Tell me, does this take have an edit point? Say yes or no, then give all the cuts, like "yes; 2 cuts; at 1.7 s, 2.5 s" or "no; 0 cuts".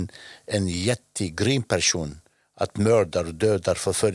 no; 0 cuts